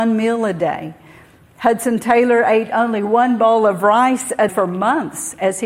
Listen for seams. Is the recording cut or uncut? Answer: cut